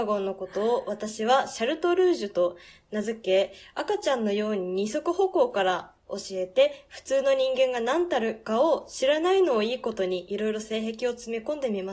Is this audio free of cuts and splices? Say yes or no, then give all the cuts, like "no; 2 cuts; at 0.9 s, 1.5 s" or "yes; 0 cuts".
yes; 0 cuts